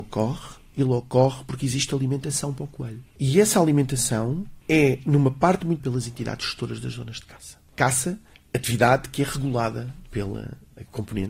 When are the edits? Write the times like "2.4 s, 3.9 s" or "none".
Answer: 5.8 s